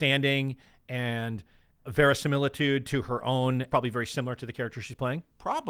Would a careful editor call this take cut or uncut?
cut